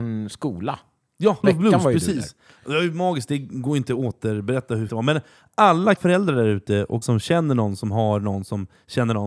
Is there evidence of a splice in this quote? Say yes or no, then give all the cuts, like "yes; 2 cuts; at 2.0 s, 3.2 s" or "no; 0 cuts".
yes; 4 cuts; at 1.4 s, 4.9 s, 6.0 s, 7.0 s